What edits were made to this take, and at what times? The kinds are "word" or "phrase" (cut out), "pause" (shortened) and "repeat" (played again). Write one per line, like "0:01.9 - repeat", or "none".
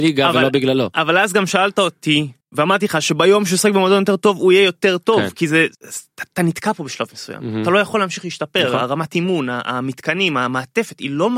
0:02.4 - pause
0:05.7 - pause

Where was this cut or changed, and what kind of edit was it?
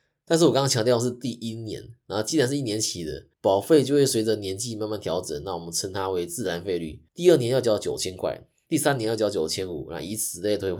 0:03.3 - pause
0:07.1 - pause

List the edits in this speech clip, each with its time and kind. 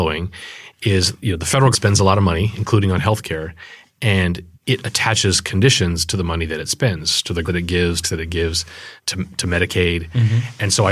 0:01.7 - word
0:04.5 - pause
0:07.5 - word
0:08.0 - phrase
0:09.0 - pause

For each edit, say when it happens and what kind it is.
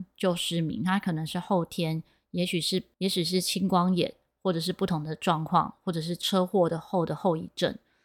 0:02.9 - pause

